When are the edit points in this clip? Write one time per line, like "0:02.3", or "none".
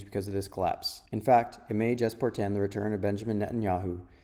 0:01.1